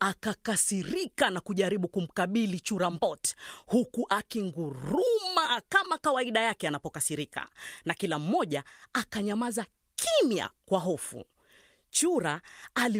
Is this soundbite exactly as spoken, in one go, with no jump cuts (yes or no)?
yes